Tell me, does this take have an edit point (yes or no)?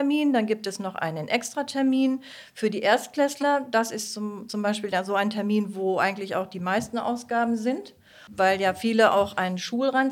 no